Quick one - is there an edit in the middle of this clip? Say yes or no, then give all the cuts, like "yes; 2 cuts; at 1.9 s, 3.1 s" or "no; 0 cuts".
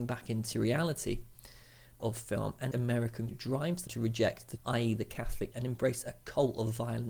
yes; 6 cuts; at 2.0 s, 2.7 s, 3.3 s, 3.9 s, 4.6 s, 5.5 s